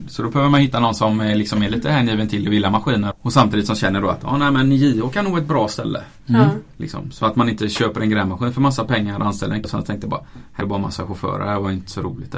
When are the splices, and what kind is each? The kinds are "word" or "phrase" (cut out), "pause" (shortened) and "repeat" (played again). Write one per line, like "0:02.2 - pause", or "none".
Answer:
0:03.1 - word
0:09.6 - word
0:10.6 - word